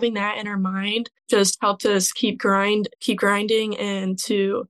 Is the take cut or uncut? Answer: cut